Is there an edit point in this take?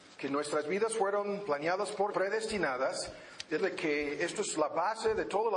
yes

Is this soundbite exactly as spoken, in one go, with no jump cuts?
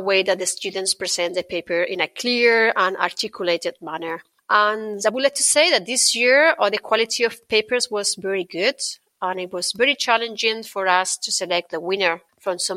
yes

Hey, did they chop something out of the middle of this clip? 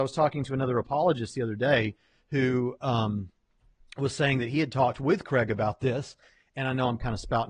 no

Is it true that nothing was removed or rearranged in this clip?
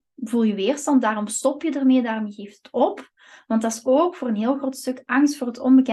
yes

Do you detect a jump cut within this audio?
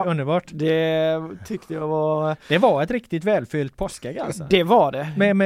no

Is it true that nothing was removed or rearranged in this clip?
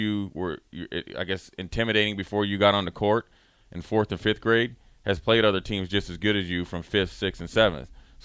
yes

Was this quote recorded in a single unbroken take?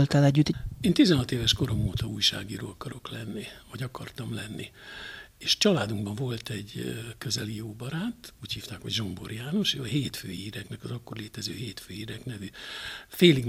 yes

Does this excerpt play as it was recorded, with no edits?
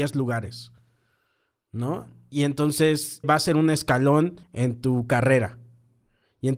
no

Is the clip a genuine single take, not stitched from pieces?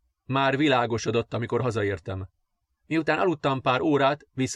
yes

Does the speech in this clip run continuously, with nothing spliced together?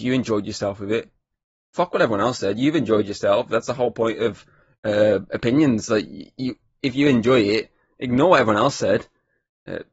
yes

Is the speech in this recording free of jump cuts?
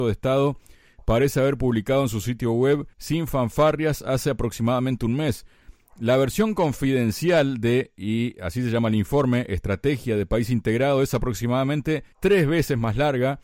no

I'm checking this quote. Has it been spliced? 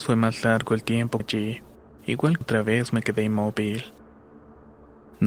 yes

